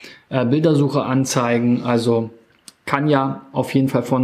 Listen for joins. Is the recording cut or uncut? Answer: uncut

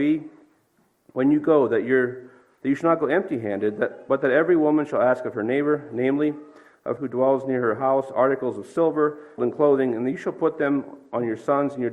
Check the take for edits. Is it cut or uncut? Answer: cut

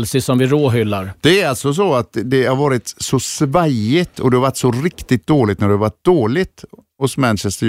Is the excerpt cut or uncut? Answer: uncut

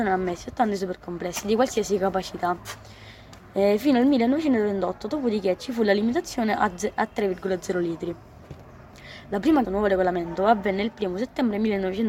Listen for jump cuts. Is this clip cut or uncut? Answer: cut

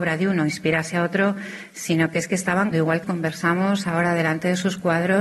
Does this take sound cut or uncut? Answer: cut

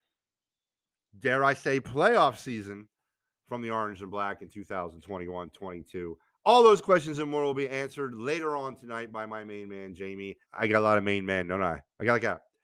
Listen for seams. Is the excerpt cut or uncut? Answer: cut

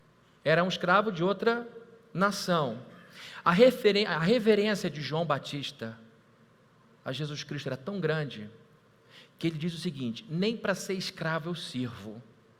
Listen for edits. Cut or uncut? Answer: uncut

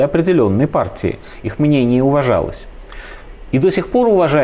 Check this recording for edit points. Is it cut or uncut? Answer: uncut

